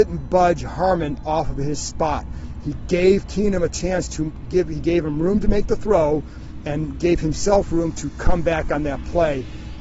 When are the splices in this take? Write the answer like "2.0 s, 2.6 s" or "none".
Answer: none